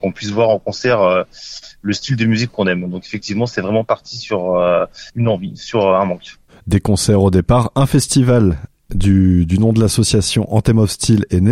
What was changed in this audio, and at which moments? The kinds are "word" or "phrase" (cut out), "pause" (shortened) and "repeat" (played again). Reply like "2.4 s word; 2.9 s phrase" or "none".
5.1 s pause

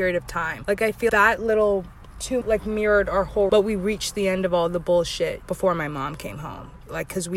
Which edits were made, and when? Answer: 1.1 s word; 2.4 s word; 3.5 s word

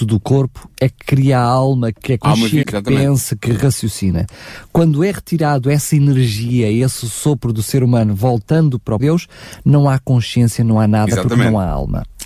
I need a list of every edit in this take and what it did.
1.9 s word; 2.6 s word; 9.0 s word

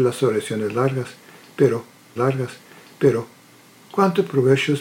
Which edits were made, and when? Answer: 2.2 s repeat

